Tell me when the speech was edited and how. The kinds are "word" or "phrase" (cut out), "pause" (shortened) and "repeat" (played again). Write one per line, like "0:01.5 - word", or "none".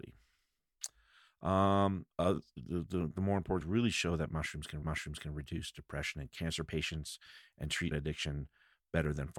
0:02.1 - pause
0:03.6 - word
0:04.8 - repeat
0:07.9 - word